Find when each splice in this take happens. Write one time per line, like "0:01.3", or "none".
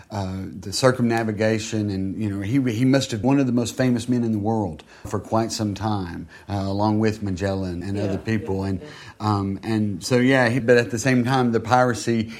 0:03.2
0:05.0
0:07.8
0:10.6